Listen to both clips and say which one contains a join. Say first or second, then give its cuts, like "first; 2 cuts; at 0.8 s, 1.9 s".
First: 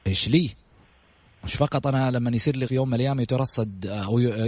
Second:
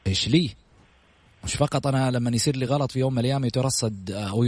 first; 1 cut; at 2.7 s